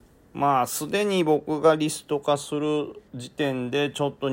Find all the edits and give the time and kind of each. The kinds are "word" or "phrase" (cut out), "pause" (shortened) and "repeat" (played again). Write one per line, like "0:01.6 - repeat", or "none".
0:03.1 - pause

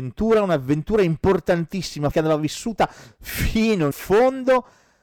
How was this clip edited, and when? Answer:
0:02.1 - word
0:03.9 - word

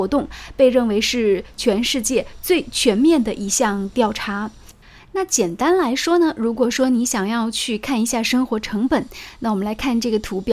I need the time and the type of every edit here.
0:04.8 - pause

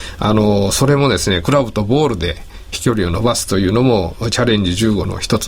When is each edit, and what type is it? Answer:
0:02.7 - phrase

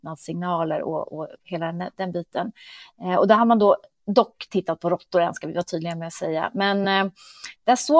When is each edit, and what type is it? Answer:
none

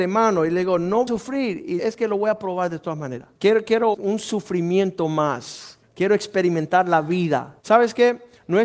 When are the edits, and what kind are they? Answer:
0:01.1 - phrase
0:01.8 - word
0:03.4 - pause
0:03.9 - word
0:05.8 - pause
0:07.6 - pause

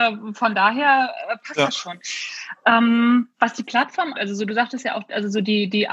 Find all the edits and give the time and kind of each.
0:03.3 - pause
0:04.1 - word

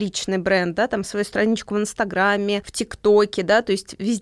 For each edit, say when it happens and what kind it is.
none

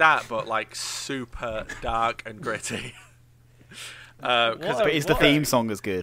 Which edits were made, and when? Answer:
none

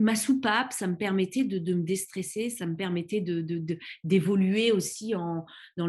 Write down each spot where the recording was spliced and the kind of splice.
none

